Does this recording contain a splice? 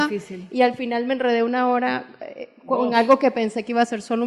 no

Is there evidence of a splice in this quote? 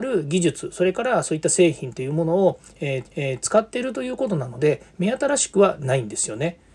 yes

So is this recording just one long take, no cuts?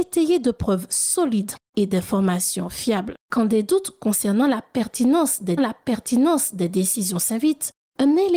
no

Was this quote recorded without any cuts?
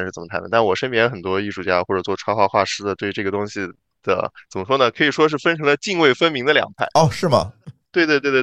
no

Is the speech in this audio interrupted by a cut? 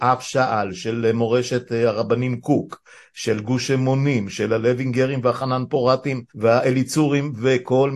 yes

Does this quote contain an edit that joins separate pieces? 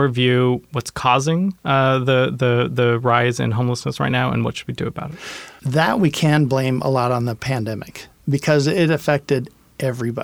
yes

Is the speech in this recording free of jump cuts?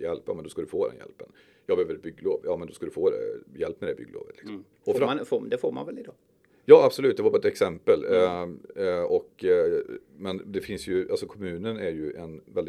no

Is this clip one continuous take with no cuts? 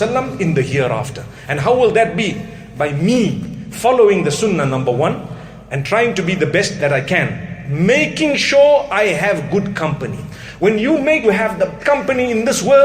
no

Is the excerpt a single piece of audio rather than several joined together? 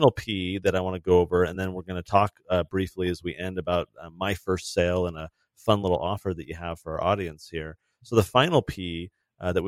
yes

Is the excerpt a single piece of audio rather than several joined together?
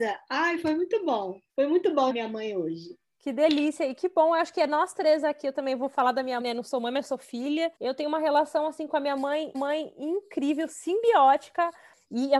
no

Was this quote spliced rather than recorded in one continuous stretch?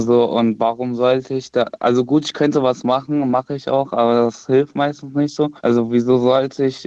yes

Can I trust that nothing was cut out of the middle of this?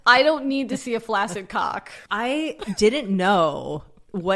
no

